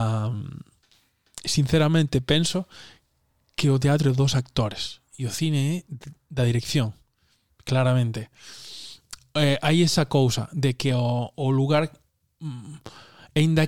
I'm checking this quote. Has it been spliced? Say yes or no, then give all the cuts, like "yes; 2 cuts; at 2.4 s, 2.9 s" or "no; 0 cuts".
no; 0 cuts